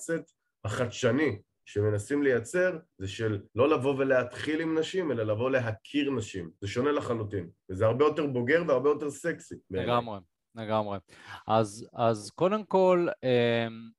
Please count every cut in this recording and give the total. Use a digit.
4